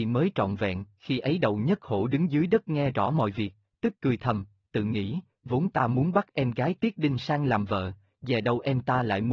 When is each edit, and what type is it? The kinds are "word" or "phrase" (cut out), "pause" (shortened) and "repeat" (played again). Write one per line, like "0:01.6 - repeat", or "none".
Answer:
none